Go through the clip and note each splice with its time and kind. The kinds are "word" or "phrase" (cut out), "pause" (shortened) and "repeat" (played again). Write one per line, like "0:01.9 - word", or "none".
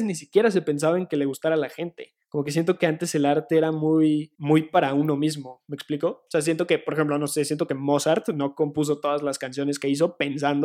0:02.2 - pause
0:04.3 - pause

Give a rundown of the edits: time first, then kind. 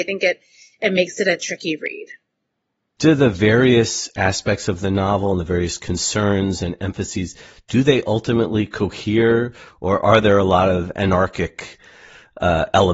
none

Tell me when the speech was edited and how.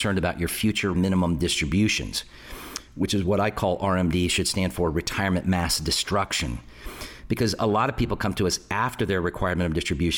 0:00.9 - word

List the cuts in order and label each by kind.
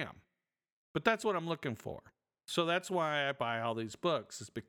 none

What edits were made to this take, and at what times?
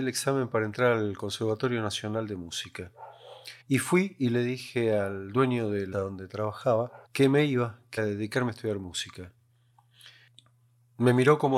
0:03.6 - pause
0:05.9 - word
0:07.0 - pause
0:08.0 - word

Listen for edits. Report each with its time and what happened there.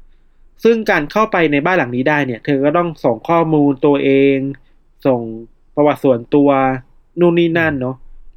none

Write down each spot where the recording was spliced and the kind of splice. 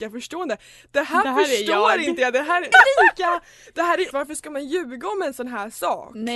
0:02.7 - word
0:04.1 - word

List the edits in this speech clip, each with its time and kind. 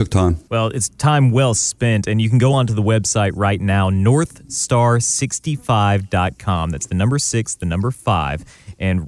none

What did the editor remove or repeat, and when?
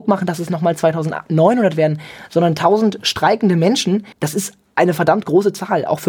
0:04.1 - pause

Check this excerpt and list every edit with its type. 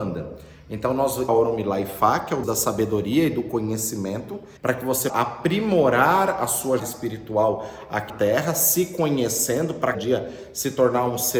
0:01.3 - phrase
0:02.4 - word
0:04.6 - pause
0:05.1 - word
0:06.8 - word
0:08.1 - word
0:09.9 - word

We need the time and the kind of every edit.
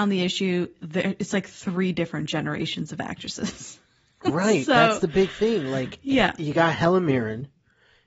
none

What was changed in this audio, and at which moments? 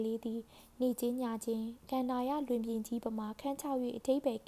none

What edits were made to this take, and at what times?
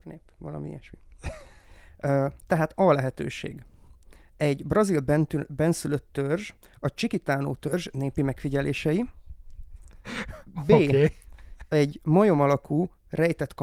none

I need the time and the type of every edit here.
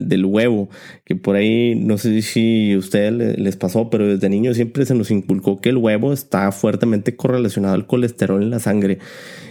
none

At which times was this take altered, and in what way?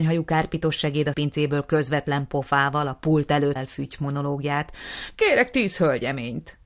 0:01.1 - word
0:03.6 - word

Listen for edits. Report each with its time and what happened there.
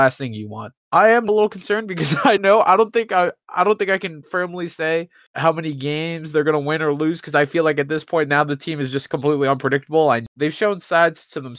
0:01.3 - word
0:02.4 - word

